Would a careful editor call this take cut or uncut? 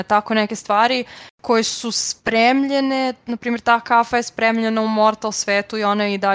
uncut